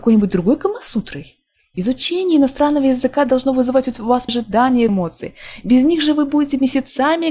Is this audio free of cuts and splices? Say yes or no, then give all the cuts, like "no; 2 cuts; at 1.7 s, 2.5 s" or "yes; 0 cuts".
no; 2 cuts; at 4.3 s, 4.9 s